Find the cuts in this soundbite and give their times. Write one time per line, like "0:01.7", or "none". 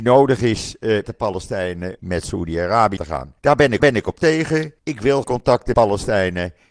0:01.0
0:02.0
0:03.0
0:03.4
0:03.8
0:04.8
0:05.2
0:05.7

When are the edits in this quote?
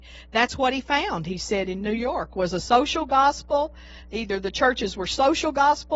none

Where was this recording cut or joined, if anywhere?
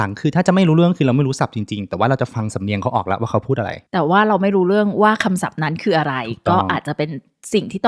0:03.9

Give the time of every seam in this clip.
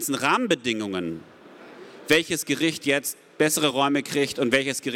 none

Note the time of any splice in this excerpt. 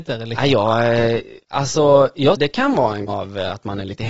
0:01.4
0:02.4
0:03.1

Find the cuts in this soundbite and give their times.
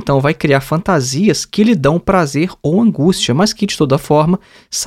none

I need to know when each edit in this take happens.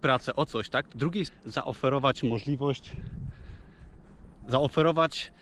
0:00.9
0:01.3
0:04.4

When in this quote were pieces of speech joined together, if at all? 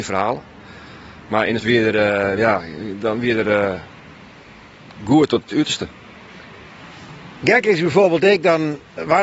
0:01.6
0:02.4

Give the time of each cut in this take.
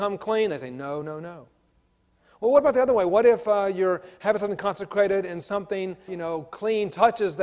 0:01.0
0:06.1

